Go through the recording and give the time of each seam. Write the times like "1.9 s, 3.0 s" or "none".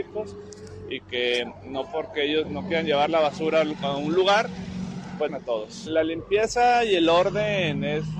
2.4 s, 5.3 s